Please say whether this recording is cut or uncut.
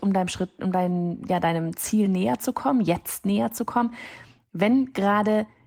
uncut